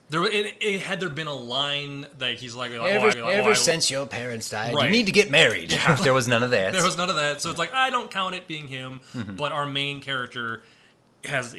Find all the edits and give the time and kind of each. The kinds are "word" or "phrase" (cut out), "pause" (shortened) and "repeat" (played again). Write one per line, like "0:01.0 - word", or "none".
0:03.1 - repeat
0:06.0 - word